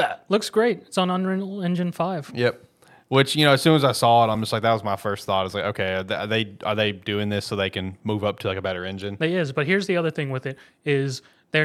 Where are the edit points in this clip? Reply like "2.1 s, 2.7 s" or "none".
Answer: none